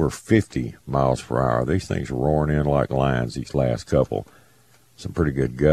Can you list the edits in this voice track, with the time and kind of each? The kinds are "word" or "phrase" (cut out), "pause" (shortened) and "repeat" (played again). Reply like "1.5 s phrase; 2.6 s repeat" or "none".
none